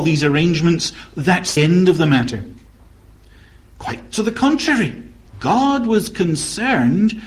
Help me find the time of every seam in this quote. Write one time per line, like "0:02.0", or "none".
0:01.6
0:05.3